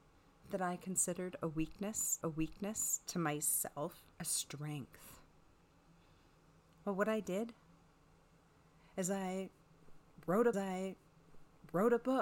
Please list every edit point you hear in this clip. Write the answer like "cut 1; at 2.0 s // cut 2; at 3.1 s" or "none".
cut 1; at 2.2 s // cut 2; at 4.1 s // cut 3; at 10.5 s